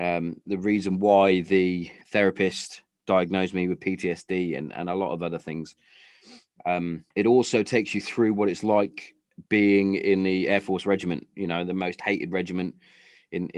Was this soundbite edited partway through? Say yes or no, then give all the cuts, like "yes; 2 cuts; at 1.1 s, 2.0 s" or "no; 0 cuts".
yes; 3 cuts; at 2.0 s, 7.1 s, 9.5 s